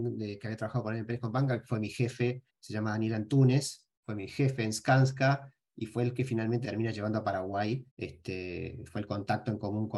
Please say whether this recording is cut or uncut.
cut